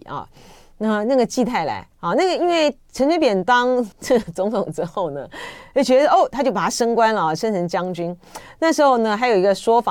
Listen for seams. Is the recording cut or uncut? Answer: cut